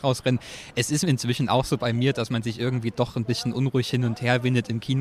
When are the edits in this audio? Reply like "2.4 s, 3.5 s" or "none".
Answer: none